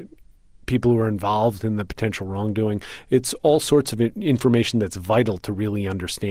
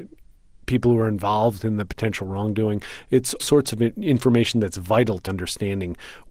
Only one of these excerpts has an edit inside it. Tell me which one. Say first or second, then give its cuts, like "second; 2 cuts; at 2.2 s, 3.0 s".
second; 2 cuts; at 3.4 s, 5.3 s